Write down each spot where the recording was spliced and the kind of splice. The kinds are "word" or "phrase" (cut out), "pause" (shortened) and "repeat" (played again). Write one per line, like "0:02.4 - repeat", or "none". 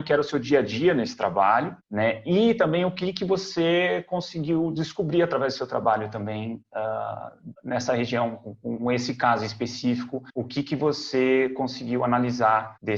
0:10.3 - pause